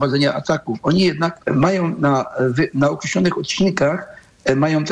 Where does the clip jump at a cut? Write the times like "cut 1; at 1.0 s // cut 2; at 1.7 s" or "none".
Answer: cut 1; at 1.4 s

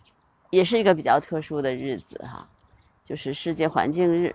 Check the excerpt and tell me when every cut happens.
none

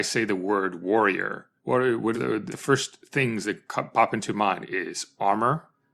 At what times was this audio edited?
cut 1; at 1.6 s // cut 2; at 2.1 s // cut 3; at 2.5 s

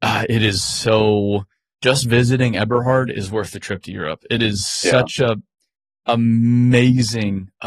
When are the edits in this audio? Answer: none

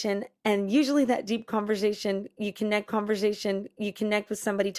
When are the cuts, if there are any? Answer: cut 1; at 2.9 s

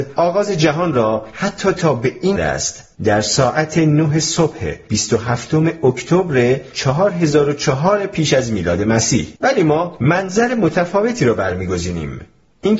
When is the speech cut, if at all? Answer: cut 1; at 2.4 s // cut 2; at 3.0 s // cut 3; at 9.4 s

